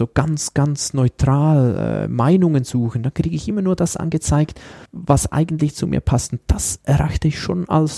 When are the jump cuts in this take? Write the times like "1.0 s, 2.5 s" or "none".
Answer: 4.9 s

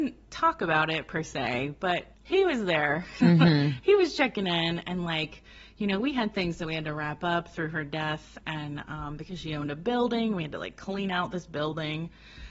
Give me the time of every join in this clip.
2.1 s

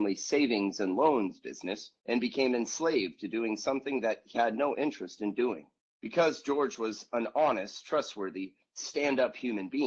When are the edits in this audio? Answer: 2.0 s, 4.3 s, 5.8 s

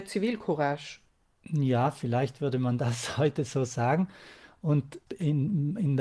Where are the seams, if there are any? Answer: none

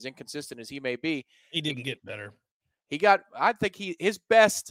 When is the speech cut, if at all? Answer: none

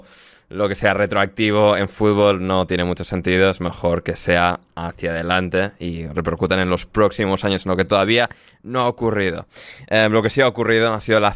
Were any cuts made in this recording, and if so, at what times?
none

